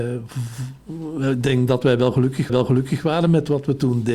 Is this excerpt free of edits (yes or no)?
no